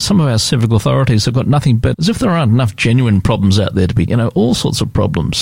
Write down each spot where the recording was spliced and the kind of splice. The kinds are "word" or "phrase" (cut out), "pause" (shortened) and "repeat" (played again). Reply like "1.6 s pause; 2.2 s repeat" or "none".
1.9 s phrase; 4.1 s word